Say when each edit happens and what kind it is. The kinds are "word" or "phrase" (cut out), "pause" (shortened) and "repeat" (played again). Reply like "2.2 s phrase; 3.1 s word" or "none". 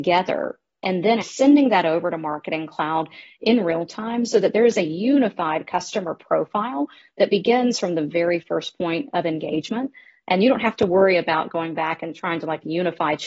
1.2 s word